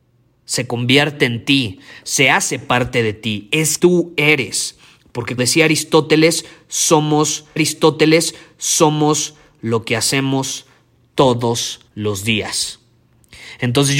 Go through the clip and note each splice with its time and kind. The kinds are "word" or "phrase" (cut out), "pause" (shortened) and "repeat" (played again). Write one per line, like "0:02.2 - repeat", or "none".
0:03.8 - word
0:05.4 - word
0:07.6 - repeat
0:11.9 - pause

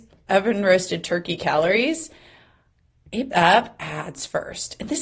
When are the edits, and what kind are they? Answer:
0:03.3 - word

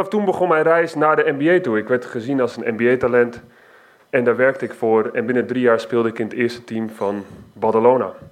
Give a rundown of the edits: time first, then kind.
none

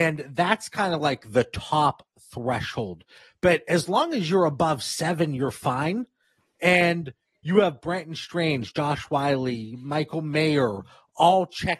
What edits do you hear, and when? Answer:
none

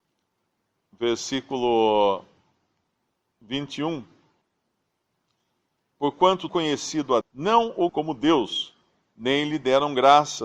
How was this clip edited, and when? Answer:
0:06.5 - word
0:07.2 - word
0:07.9 - word

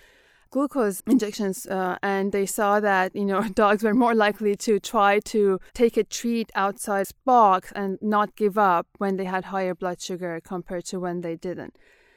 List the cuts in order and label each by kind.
0:01.0 - word
0:05.7 - pause
0:07.0 - phrase

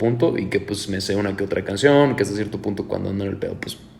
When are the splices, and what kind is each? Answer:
none

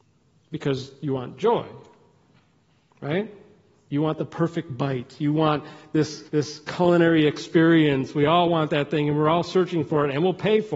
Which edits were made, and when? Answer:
0:06.3 - pause

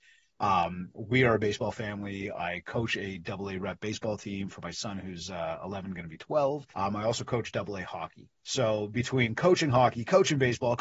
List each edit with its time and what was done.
0:06.7 - pause
0:08.4 - pause

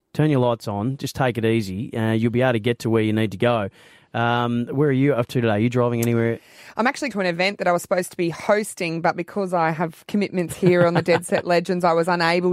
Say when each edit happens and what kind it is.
0:07.1 - word

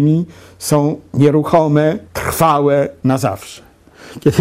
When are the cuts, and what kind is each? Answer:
0:02.1 - pause

